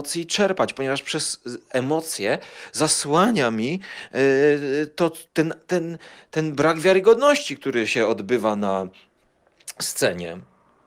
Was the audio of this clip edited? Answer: yes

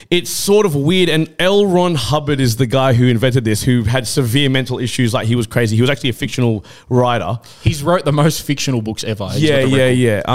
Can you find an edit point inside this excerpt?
no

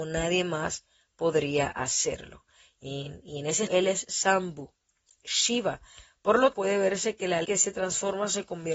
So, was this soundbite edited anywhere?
yes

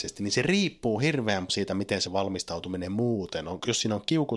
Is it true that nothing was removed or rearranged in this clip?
no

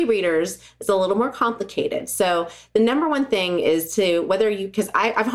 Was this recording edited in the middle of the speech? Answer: no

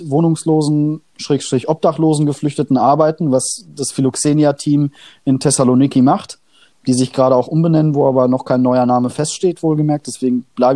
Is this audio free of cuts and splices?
yes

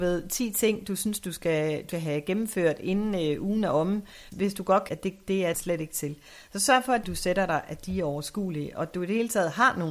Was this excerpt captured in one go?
no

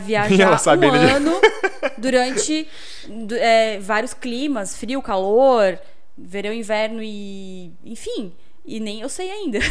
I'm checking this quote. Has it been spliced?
no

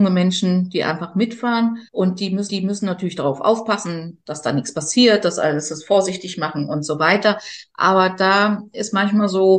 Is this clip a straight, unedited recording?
no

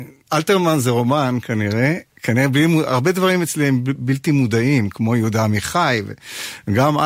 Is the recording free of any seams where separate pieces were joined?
yes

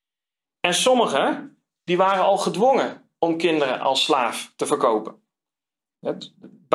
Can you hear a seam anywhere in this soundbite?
no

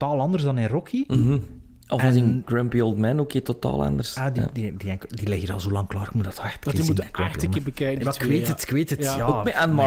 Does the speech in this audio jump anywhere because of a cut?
no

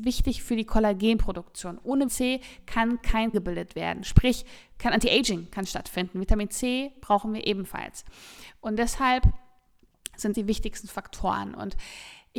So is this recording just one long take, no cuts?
no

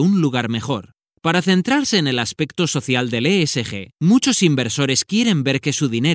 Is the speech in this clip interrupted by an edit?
no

